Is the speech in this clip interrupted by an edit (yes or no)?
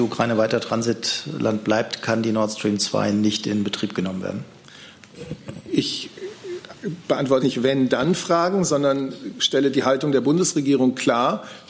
yes